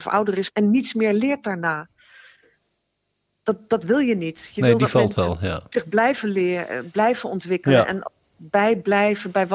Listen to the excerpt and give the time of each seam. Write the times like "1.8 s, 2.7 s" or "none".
none